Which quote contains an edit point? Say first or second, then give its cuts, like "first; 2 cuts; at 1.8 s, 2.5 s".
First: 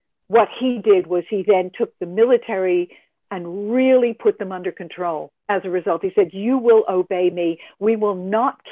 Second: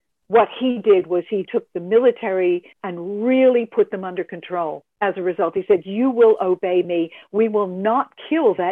second; 2 cuts; at 1.5 s, 2.7 s